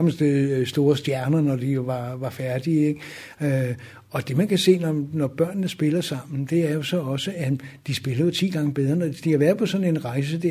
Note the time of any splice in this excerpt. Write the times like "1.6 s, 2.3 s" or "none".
none